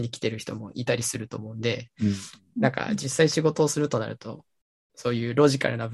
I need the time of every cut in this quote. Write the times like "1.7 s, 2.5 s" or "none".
none